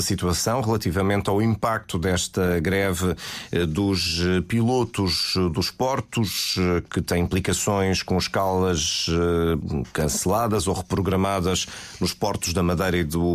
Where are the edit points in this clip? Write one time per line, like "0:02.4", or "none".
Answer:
none